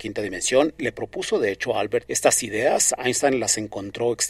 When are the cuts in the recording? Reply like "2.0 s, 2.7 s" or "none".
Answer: 2.0 s